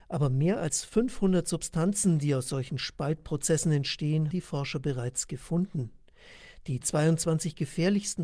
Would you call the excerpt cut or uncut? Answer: cut